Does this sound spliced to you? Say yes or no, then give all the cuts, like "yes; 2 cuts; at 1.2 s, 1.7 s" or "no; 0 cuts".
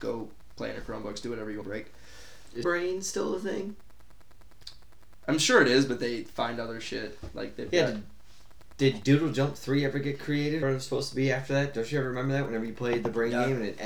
yes; 3 cuts; at 1.6 s, 2.6 s, 10.6 s